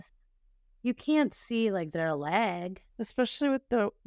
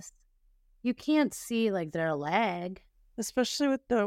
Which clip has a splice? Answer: first; 1 cut; at 2.9 s

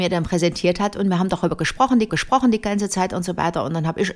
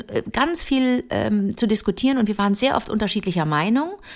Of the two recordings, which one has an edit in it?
first; 1 cut; at 2.1 s

